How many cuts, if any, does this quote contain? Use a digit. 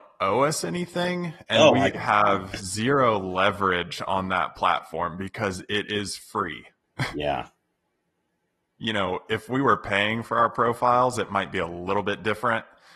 1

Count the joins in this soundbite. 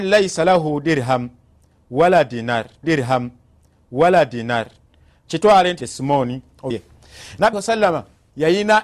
4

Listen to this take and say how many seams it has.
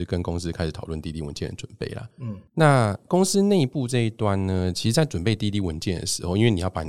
1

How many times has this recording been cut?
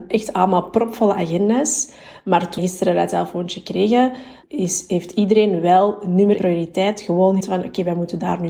4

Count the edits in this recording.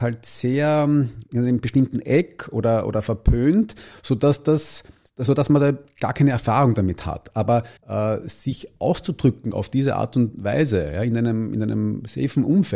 2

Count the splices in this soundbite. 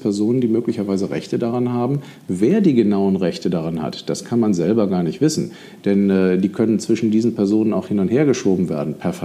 0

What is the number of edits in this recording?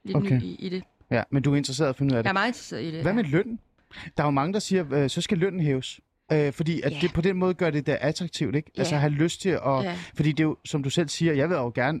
0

